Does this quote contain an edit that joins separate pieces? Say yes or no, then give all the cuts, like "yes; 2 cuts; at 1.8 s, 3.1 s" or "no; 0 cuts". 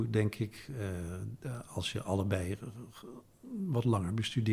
no; 0 cuts